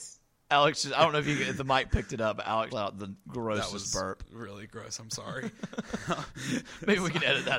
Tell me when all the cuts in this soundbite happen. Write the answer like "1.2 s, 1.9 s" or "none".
2.7 s